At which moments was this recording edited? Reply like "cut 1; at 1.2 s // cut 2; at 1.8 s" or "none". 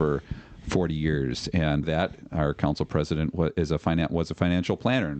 cut 1; at 1.8 s